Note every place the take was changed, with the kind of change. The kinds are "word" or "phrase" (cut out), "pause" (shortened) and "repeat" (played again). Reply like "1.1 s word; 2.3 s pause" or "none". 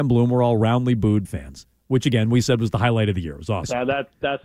1.3 s word